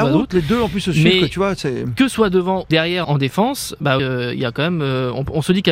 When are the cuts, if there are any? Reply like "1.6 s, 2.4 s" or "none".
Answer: 2.1 s, 2.7 s, 3.0 s, 4.0 s